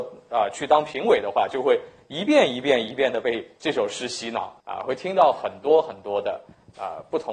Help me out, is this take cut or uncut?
cut